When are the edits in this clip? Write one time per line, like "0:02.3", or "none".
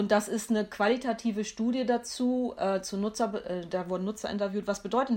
none